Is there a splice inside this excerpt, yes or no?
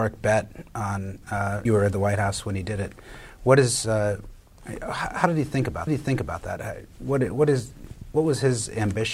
yes